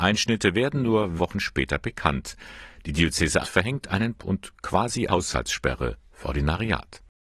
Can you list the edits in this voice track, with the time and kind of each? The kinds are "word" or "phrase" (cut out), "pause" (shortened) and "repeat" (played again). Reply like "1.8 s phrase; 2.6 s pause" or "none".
1.2 s word; 3.4 s word; 4.2 s word; 5.1 s word; 6.2 s word